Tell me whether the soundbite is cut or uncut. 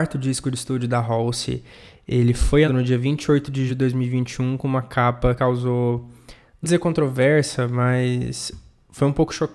cut